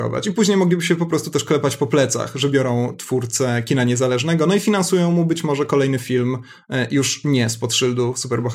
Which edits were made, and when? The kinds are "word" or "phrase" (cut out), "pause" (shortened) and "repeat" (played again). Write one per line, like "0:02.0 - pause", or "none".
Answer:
none